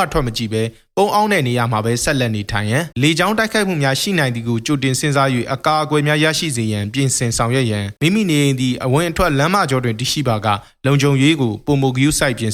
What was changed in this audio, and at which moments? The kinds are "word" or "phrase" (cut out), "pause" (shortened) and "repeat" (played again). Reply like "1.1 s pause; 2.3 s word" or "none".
2.9 s pause; 8.0 s pause

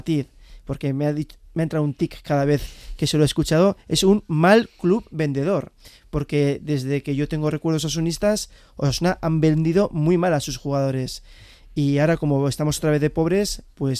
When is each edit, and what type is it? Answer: none

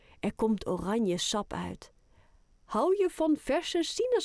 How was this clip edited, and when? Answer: none

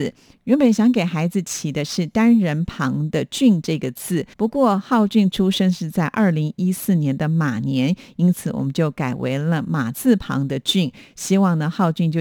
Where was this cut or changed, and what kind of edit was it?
4.3 s pause

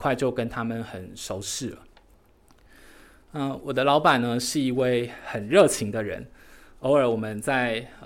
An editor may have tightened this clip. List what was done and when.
none

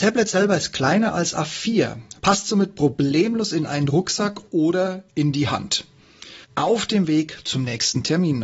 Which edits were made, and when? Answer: 2.2 s pause; 6.4 s pause

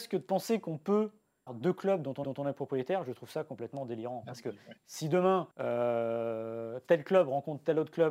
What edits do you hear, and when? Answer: 1.5 s word; 2.2 s repeat; 5.5 s pause

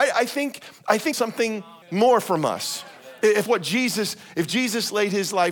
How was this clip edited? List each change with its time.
1.1 s phrase; 1.8 s pause; 3.5 s word

